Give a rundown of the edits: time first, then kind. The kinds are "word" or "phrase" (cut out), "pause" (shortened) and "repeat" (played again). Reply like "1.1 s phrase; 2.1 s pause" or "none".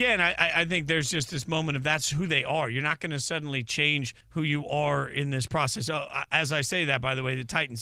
4.2 s pause